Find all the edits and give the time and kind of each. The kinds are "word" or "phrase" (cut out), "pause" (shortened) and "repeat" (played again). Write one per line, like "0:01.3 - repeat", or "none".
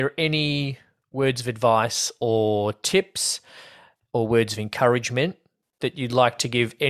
none

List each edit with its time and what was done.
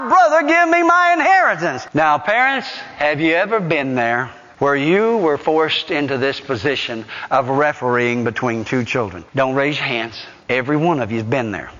none

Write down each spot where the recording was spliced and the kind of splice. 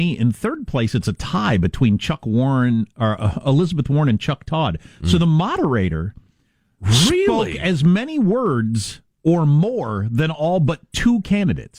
none

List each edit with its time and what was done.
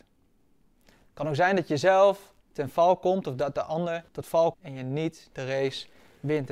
0:02.4 - pause
0:04.1 - pause
0:04.5 - word

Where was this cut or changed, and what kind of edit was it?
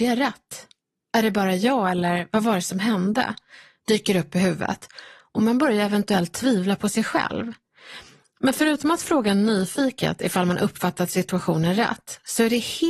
none

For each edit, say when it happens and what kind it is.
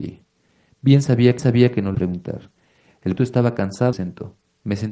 0:01.4 - repeat
0:01.9 - word
0:03.2 - word
0:03.9 - phrase

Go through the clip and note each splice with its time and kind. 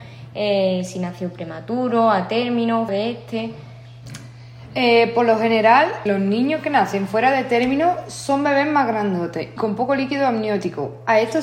0:02.9 - word
0:06.1 - word
0:09.6 - word

